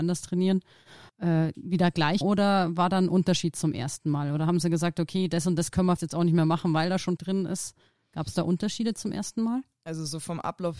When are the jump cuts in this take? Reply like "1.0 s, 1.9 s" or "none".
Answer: 1.1 s, 2.2 s, 6.0 s, 7.2 s